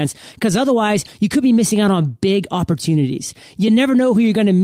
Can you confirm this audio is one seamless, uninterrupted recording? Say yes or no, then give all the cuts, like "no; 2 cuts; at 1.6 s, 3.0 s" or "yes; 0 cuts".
yes; 0 cuts